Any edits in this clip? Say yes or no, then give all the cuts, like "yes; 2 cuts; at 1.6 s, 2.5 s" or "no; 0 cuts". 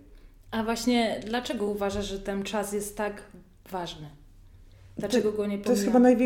no; 0 cuts